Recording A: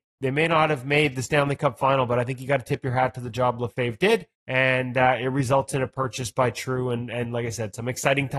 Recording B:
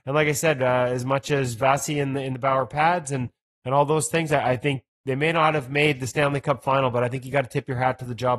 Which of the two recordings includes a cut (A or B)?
A